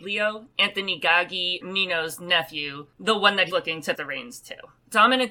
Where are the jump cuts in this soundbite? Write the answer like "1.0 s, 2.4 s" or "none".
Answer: 1.6 s, 3.5 s, 3.9 s